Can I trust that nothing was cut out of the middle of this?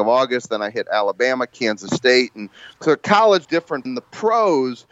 no; 3 cuts; at 2.7 s, 3.4 s, 3.9 s

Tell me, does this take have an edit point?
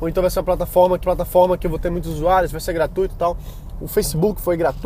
yes; 1 cut; at 1.0 s

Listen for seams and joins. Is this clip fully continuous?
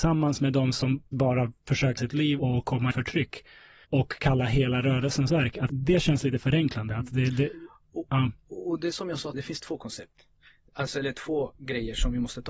no; 8 cuts; at 1.1 s, 2.0 s, 2.4 s, 2.9 s, 3.8 s, 5.3 s, 5.7 s, 9.3 s

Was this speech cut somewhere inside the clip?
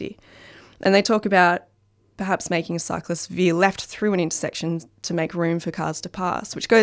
no; 0 cuts

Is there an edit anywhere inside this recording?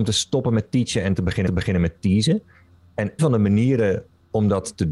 yes; 2 cuts; at 1.5 s, 3.2 s

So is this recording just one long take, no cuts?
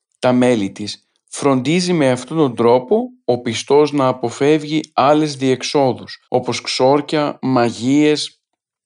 no; 1 cut; at 6.2 s

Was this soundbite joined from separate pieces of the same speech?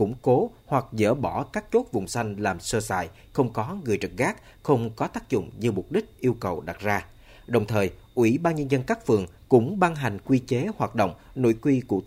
no; 0 cuts

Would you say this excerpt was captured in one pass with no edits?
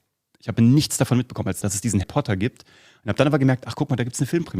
no; 2 cuts; at 1.6 s, 2.0 s

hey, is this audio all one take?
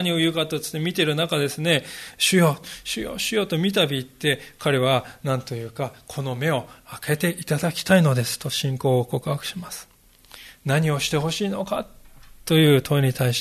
yes; 0 cuts

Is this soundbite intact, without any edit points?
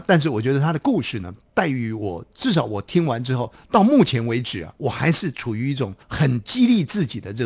no; 2 cuts; at 4.7 s, 6.0 s

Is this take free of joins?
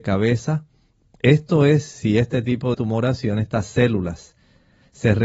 no; 1 cut; at 2.7 s

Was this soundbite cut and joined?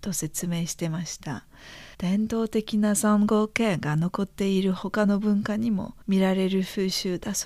yes; 2 cuts; at 1.9 s, 6.0 s

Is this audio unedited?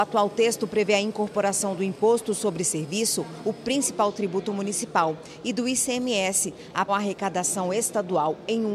no; 1 cut; at 6.9 s

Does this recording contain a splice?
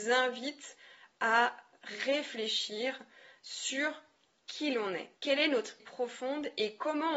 yes; 2 cuts; at 5.2 s, 5.8 s

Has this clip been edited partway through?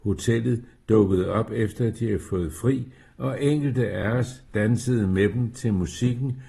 no; 0 cuts

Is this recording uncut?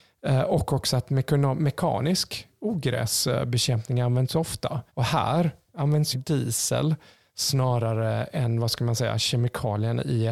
no; 2 cuts; at 4.9 s, 6.1 s

